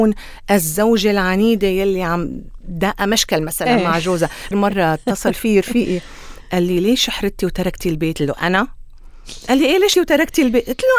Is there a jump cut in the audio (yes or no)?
yes